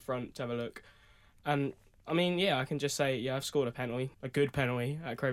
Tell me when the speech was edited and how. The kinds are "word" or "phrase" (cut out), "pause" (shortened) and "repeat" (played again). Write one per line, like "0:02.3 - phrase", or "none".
0:04.1 - pause